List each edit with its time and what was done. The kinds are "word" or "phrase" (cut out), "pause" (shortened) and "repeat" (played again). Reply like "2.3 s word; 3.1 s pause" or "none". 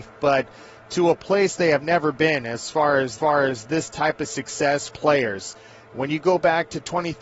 3.2 s repeat; 4.9 s phrase